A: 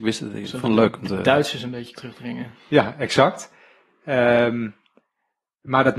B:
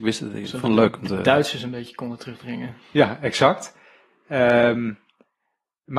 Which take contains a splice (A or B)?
A